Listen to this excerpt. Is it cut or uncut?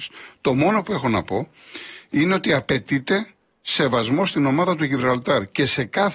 uncut